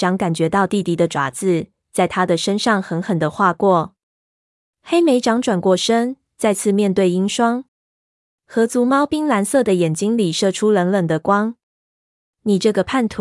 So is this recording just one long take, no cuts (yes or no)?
yes